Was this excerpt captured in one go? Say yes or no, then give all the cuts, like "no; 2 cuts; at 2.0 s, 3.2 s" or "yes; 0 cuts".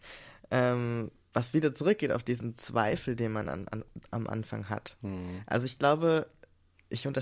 yes; 0 cuts